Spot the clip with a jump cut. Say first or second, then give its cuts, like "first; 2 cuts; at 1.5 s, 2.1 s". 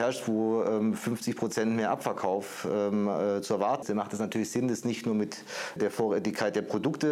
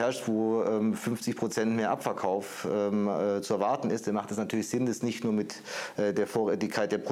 first; 2 cuts; at 3.8 s, 5.8 s